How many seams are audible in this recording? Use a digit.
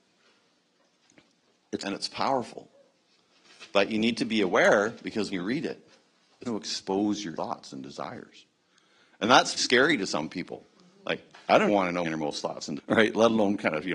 8